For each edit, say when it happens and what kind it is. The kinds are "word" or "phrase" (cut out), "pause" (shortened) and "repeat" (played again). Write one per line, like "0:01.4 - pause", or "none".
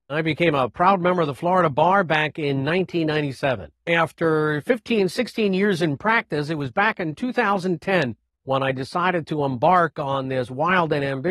none